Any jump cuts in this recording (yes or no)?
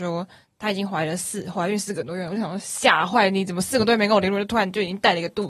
no